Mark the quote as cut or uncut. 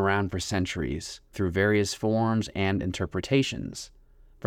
cut